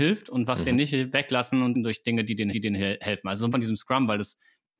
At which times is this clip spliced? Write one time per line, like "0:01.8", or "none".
0:01.7
0:02.5
0:03.5